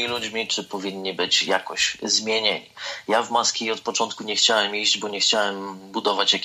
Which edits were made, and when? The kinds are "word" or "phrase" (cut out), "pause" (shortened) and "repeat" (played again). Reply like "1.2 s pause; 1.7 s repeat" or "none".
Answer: none

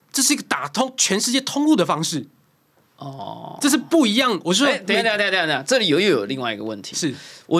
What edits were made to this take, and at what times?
none

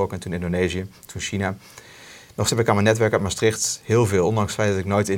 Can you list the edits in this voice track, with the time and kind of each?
2.5 s word

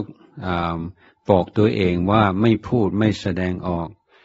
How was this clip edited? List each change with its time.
none

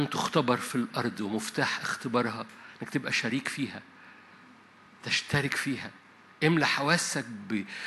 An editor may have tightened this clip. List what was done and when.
none

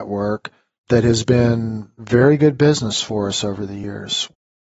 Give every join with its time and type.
none

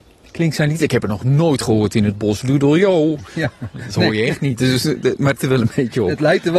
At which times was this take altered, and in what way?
5.4 s word

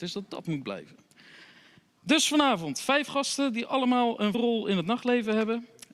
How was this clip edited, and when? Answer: 4.3 s word

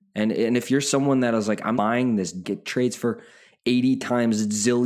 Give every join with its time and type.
1.7 s word; 2.4 s word

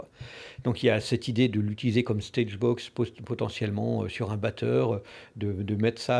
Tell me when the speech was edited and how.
none

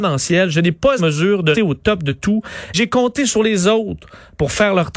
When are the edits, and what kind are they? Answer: 1.0 s phrase; 1.5 s word; 2.7 s word

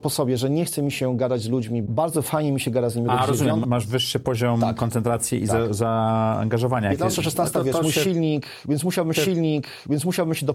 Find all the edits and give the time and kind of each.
3.6 s word; 9.1 s repeat

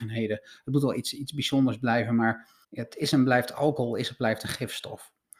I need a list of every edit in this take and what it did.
2.6 s pause

